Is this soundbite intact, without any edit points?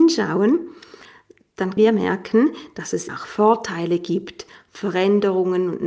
no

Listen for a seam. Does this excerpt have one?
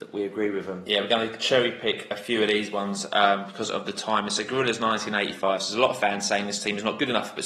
no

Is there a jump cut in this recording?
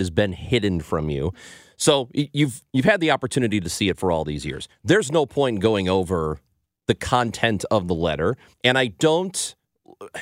yes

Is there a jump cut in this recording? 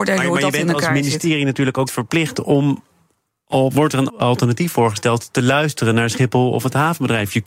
yes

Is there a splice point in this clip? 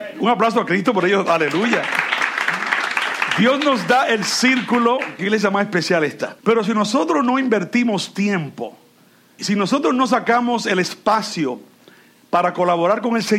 yes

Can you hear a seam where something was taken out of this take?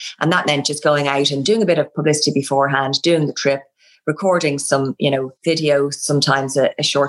yes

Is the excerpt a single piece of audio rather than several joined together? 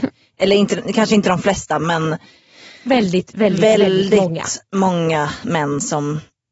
yes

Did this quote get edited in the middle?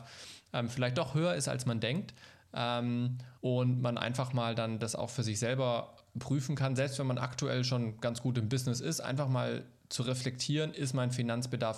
yes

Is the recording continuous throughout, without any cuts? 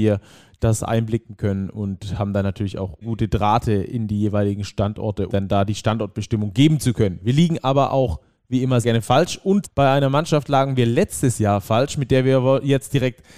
no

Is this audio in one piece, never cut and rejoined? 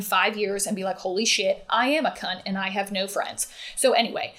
yes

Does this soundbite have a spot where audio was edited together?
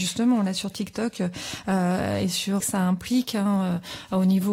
yes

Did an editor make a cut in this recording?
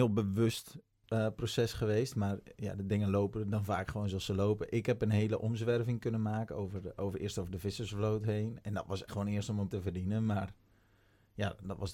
yes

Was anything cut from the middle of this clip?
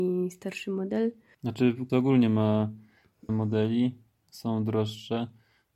yes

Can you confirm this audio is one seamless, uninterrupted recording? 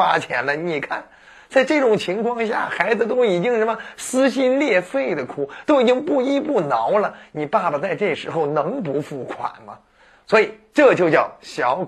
yes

